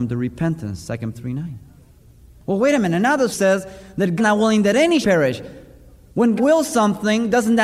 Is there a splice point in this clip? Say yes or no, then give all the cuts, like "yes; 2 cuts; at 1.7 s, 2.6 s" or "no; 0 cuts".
yes; 5 cuts; at 1.1 s, 3.3 s, 4.2 s, 5.0 s, 6.4 s